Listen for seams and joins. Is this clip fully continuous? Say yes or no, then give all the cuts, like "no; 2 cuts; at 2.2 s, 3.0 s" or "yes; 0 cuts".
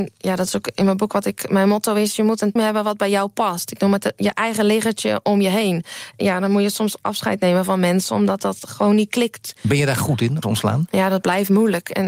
no; 2 cuts; at 2.6 s, 10.4 s